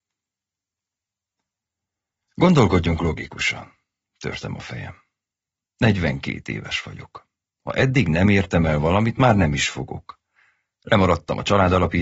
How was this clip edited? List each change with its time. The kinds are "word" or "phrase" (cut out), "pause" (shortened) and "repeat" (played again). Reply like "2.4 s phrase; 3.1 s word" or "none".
none